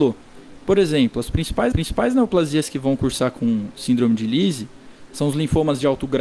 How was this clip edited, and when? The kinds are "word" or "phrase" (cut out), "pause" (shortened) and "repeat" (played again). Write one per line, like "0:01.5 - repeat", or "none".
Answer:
0:01.7 - repeat